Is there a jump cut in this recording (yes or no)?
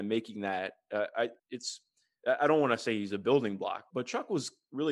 yes